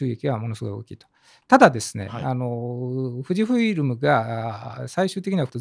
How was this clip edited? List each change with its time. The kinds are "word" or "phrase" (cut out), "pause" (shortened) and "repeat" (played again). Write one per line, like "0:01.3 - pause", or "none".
none